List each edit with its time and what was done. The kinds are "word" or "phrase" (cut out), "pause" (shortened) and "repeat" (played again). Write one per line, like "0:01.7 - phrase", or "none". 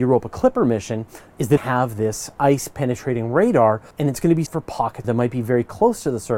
0:01.6 - phrase
0:03.9 - pause
0:04.5 - word
0:05.0 - phrase